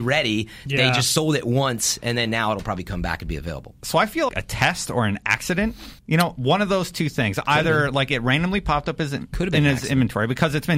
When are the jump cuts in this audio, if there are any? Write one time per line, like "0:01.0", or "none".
0:04.3
0:06.0